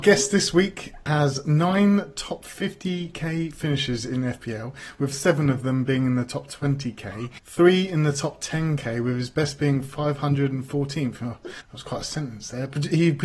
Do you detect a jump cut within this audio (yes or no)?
yes